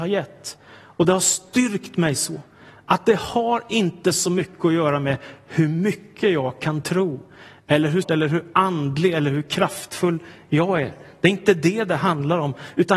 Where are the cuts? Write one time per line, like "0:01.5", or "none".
0:08.0